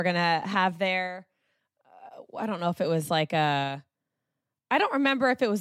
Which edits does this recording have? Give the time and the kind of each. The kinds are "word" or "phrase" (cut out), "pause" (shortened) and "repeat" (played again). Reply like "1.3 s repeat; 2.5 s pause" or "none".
none